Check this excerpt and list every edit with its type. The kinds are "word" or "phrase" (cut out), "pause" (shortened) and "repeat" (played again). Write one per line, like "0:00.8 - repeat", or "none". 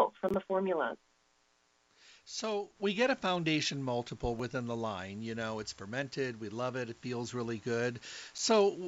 0:02.8 - pause